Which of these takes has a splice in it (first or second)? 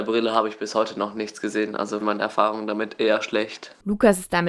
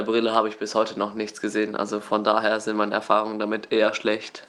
first